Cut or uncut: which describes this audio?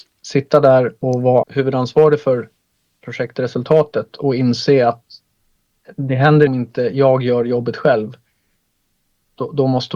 cut